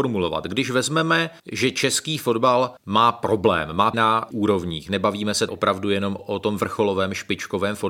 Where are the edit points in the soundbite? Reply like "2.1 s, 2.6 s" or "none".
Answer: 1.4 s, 2.8 s, 3.9 s, 4.3 s, 5.5 s, 6.2 s